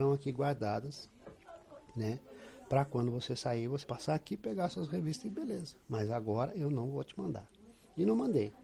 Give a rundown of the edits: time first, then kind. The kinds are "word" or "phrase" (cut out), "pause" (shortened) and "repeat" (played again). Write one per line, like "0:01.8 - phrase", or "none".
0:03.8 - word